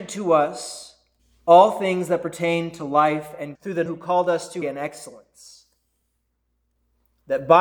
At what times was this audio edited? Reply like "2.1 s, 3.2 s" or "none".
1.2 s, 3.5 s, 3.9 s, 4.6 s